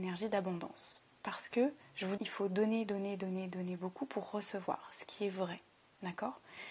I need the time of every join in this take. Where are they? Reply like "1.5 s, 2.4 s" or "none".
1.8 s, 2.2 s